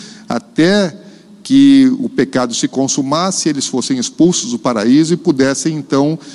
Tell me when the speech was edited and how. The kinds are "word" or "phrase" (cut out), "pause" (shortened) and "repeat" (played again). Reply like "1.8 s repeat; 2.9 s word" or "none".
none